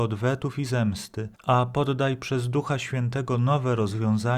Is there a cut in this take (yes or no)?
yes